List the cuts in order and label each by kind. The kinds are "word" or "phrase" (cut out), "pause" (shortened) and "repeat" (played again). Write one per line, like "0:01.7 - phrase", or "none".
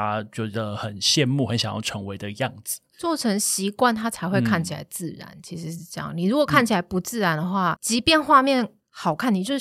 0:07.8 - word

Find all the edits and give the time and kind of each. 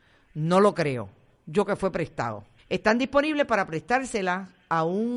0:01.7 - word
0:02.6 - pause

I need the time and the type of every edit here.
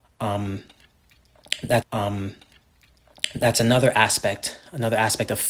0:01.8 - repeat

